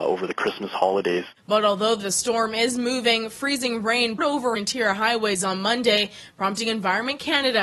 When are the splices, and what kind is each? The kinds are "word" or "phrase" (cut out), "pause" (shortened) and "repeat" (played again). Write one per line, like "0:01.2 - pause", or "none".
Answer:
0:04.2 - word
0:04.6 - word